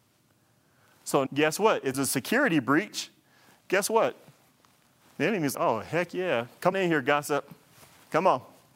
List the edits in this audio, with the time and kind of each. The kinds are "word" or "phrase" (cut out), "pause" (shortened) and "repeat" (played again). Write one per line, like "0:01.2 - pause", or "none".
0:01.3 - word
0:01.9 - word
0:05.5 - word
0:06.7 - word

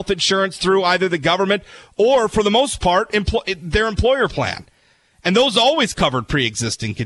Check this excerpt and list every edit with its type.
none

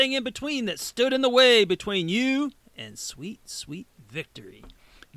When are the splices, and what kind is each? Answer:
none

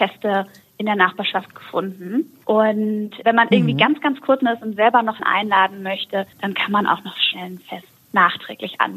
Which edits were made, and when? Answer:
0:04.4 - word
0:05.2 - word
0:06.3 - pause

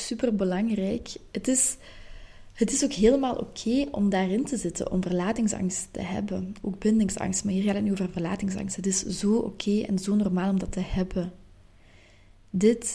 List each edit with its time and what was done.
none

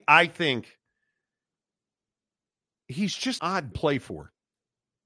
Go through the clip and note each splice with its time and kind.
0:03.4 - word
0:03.7 - phrase

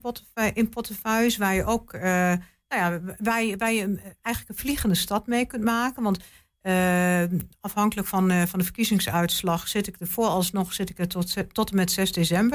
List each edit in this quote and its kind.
none

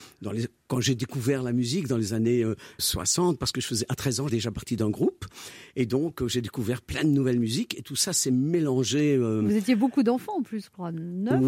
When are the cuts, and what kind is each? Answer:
0:02.8 - word
0:04.3 - phrase

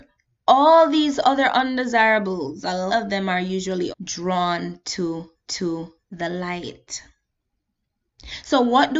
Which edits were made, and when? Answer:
0:02.9 - word
0:03.9 - word
0:05.5 - repeat

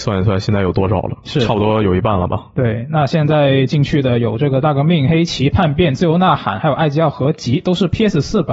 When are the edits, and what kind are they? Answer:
none

